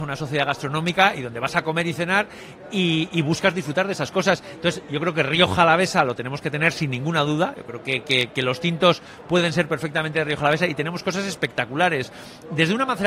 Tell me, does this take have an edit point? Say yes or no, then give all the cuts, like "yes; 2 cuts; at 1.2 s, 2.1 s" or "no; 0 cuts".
no; 0 cuts